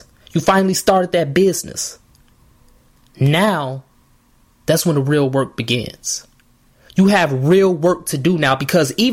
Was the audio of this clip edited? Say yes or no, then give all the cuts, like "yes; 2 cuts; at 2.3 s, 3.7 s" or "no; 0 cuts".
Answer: no; 0 cuts